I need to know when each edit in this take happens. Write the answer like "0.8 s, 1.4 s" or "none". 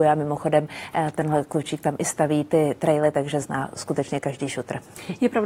none